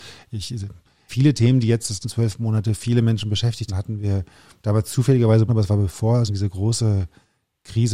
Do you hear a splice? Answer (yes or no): yes